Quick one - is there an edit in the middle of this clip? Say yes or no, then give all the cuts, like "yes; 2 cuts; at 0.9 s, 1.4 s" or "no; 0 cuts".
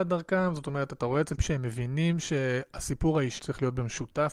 yes; 2 cuts; at 1.4 s, 3.4 s